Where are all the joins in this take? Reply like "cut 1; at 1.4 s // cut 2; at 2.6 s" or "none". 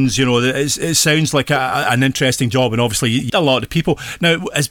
cut 1; at 3.3 s